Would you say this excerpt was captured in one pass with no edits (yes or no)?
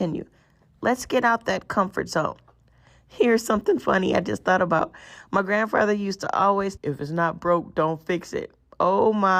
no